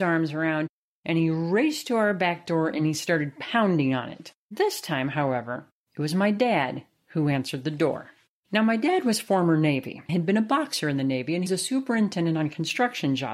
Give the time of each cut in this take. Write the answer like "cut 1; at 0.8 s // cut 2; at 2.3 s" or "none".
cut 1; at 10.1 s // cut 2; at 11.5 s